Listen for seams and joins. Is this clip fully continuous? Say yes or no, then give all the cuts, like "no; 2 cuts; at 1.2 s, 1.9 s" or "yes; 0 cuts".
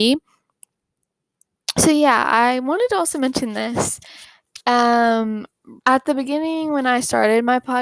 no; 1 cut; at 5.8 s